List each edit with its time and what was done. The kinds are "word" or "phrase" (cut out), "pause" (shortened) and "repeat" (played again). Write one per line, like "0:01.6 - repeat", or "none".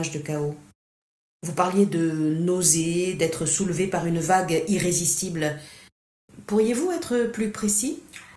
none

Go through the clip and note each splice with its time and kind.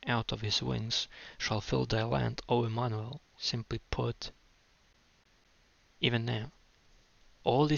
0:01.9 - phrase
0:03.3 - pause

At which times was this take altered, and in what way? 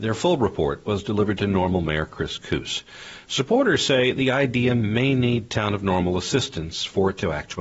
none

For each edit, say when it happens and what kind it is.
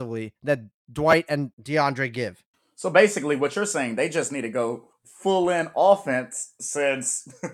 none

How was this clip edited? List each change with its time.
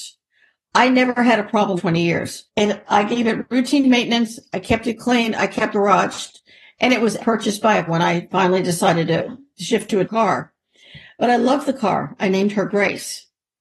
0:01.8 - phrase
0:02.5 - pause
0:05.7 - word
0:07.2 - word
0:07.9 - word
0:10.0 - word

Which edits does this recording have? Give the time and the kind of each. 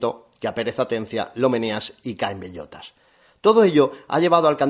none

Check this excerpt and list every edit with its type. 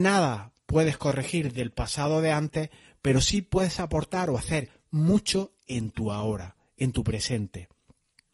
none

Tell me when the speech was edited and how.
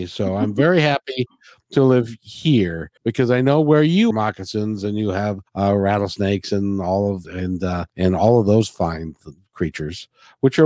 0:03.0 - pause
0:04.1 - phrase
0:05.5 - pause
0:07.2 - word
0:07.9 - pause

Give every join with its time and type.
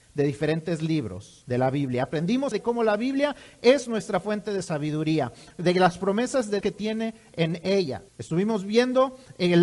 0:01.4 - pause
0:02.5 - word
0:06.6 - word
0:08.1 - pause

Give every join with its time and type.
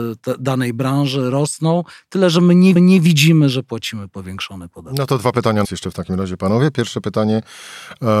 0:02.8 - repeat
0:05.6 - phrase

